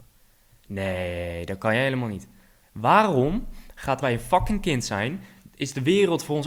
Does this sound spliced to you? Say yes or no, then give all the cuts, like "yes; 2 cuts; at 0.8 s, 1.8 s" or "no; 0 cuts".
yes; 2 cuts; at 2.6 s, 4.0 s